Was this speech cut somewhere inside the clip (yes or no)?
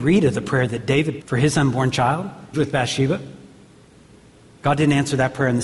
yes